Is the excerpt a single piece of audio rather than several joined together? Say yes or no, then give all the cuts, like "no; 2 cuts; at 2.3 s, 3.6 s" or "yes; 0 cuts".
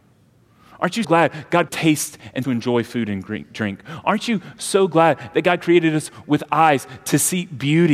no; 3 cuts; at 1.0 s, 1.7 s, 2.4 s